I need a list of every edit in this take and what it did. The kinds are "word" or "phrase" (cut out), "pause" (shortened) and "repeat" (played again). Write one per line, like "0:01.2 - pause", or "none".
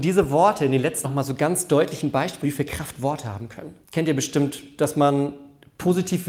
0:01.0 - phrase
0:02.4 - word
0:03.8 - pause